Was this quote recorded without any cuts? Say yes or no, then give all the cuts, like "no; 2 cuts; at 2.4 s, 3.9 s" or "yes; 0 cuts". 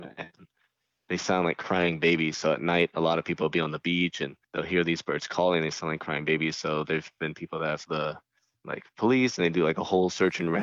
no; 3 cuts; at 4.4 s, 7.2 s, 7.9 s